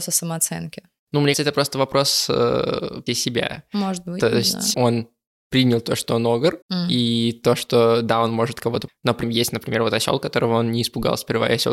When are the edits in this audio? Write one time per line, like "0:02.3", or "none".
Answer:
0:01.3
0:03.1
0:04.7
0:06.6
0:08.9
0:09.2